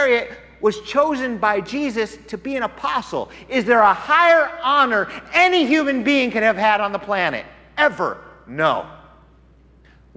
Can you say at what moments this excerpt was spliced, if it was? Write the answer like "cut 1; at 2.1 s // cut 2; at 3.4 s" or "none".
none